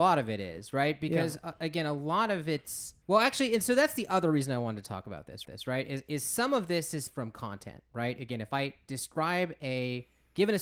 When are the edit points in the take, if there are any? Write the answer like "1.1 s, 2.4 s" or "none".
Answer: 3.0 s, 5.4 s, 7.1 s